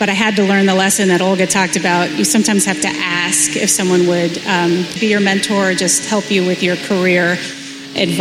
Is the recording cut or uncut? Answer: cut